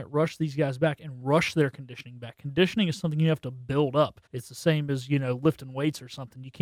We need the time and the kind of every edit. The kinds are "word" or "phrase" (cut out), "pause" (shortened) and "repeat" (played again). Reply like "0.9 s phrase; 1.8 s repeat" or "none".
4.3 s pause